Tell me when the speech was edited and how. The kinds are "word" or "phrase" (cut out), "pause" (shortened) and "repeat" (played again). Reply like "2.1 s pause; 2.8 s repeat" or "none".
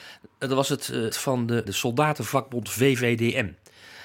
1.1 s phrase; 1.6 s phrase